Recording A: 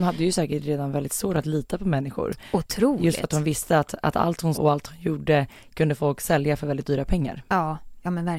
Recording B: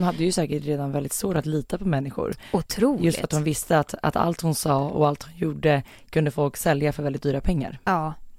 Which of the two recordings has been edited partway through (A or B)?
A